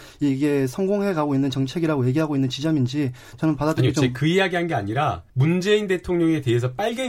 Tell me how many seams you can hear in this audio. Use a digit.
1